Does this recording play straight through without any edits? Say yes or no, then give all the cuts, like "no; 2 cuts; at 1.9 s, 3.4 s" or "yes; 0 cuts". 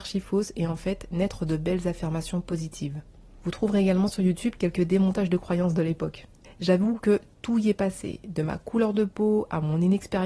yes; 0 cuts